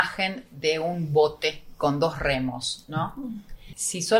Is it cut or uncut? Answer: uncut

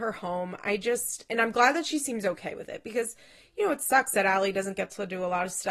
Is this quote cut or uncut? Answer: uncut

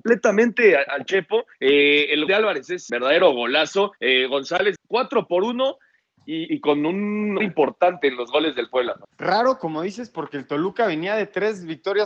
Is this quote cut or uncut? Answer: cut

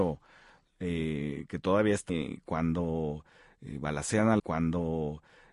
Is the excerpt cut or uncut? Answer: cut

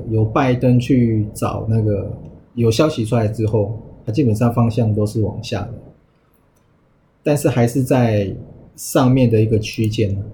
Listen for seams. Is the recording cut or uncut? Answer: uncut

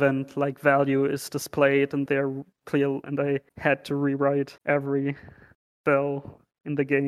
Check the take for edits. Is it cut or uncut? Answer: cut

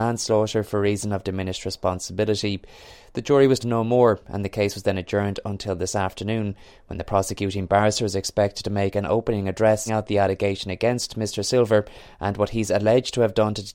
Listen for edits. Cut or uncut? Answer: cut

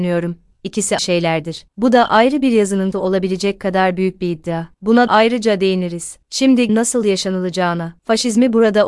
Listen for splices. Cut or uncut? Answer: cut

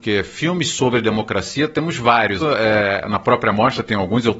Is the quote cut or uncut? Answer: cut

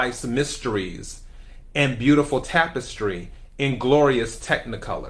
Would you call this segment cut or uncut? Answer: uncut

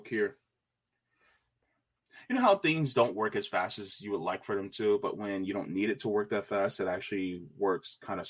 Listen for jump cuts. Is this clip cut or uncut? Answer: uncut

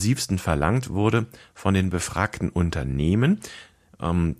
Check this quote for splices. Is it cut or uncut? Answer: uncut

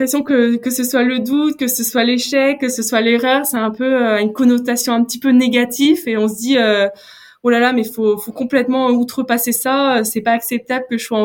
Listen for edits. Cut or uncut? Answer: uncut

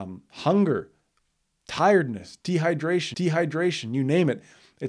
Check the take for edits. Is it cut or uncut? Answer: cut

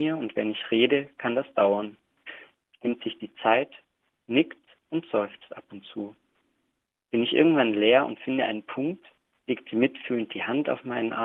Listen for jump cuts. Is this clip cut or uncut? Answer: uncut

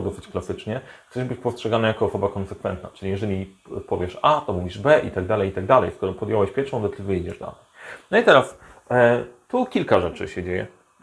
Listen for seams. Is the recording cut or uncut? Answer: uncut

